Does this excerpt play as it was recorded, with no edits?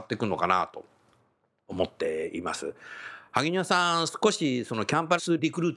yes; 0 cuts

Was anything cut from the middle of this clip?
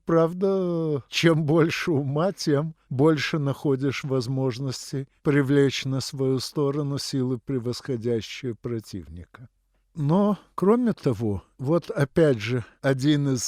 no; 0 cuts

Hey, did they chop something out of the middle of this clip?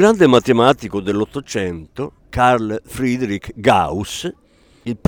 yes; 1 cut; at 2.2 s

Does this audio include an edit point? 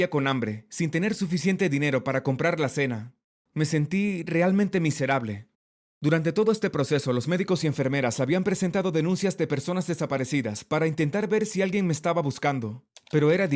no; 0 cuts

